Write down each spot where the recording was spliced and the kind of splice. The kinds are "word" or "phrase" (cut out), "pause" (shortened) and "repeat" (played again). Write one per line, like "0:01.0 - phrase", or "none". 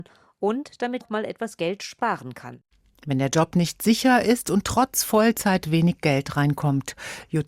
0:01.0 - word